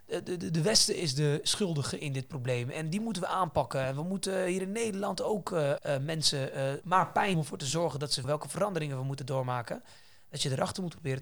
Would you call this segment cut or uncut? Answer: cut